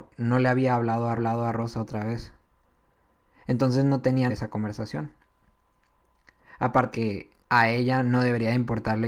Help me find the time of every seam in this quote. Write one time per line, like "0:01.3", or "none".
0:01.2
0:04.3
0:06.9
0:07.4